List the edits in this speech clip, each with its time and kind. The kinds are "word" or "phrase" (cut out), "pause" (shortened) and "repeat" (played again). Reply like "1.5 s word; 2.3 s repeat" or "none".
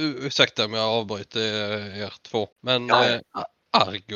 2.5 s pause